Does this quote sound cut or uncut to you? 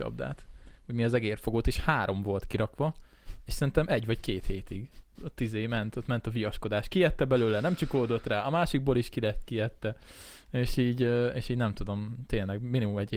uncut